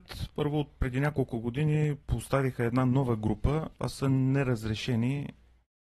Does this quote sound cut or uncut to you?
cut